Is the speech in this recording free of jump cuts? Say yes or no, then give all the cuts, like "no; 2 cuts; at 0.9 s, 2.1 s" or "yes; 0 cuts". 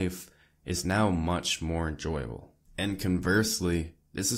no; 1 cut; at 2.6 s